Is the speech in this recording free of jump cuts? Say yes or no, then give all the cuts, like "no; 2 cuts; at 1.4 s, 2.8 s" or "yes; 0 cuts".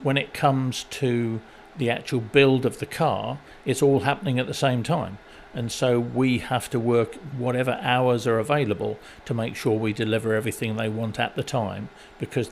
yes; 0 cuts